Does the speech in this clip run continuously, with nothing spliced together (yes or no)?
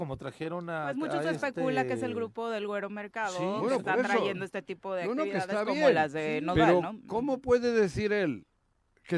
yes